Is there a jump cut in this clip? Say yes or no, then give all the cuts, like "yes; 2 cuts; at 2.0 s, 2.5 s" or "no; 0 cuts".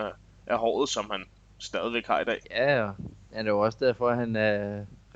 yes; 1 cut; at 2.4 s